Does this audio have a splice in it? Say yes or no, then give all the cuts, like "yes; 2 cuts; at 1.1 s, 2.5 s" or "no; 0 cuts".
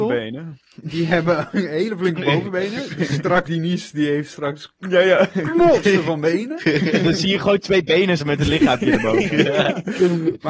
yes; 2 cuts; at 3.4 s, 8.2 s